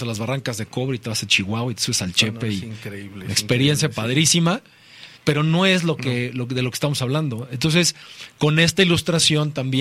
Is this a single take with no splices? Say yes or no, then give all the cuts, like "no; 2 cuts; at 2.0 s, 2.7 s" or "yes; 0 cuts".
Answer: no; 1 cut; at 5.2 s